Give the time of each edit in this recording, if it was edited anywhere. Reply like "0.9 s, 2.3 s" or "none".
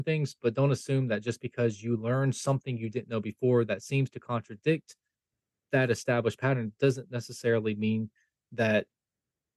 none

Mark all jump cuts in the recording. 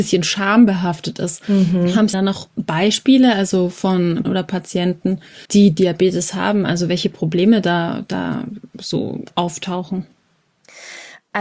2.1 s, 2.5 s, 4.2 s, 5.4 s

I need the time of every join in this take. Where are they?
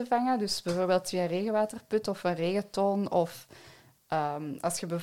none

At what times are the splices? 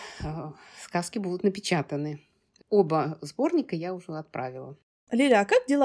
2.6 s

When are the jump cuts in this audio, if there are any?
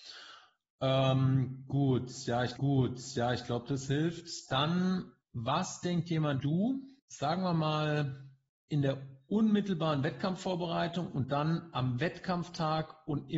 2.6 s, 5.2 s, 6.4 s, 7.0 s

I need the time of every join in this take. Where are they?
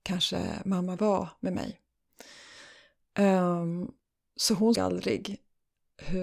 1.0 s, 4.7 s

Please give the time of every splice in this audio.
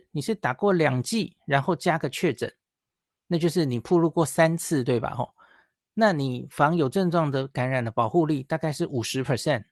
none

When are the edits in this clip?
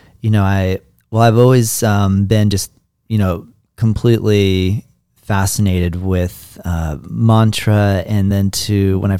none

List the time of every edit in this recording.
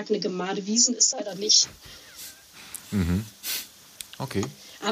1.1 s

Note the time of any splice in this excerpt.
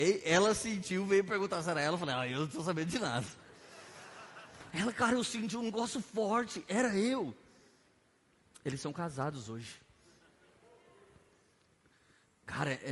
none

